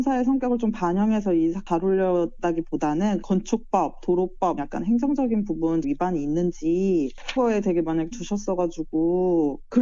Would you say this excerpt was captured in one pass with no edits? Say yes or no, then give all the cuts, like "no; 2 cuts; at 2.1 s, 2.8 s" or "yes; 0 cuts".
no; 5 cuts; at 3.2 s, 4.6 s, 5.8 s, 7.4 s, 8.1 s